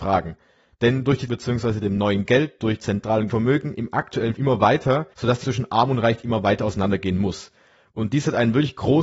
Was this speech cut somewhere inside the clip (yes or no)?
yes